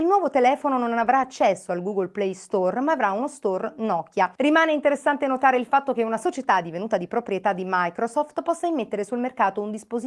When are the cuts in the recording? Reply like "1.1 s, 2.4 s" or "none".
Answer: 4.3 s